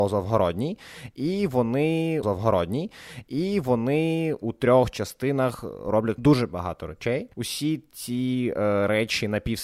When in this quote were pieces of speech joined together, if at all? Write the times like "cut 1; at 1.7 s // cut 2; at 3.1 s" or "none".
cut 1; at 2.2 s // cut 2; at 6.2 s // cut 3; at 7.3 s